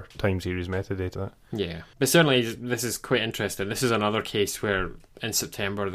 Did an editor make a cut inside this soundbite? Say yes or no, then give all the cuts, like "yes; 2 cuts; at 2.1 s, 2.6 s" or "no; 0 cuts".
yes; 2 cuts; at 1.1 s, 1.9 s